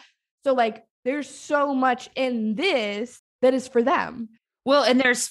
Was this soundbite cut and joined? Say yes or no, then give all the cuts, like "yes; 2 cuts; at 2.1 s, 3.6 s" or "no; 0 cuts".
yes; 2 cuts; at 0.9 s, 3.3 s